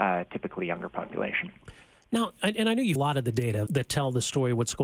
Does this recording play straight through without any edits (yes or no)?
no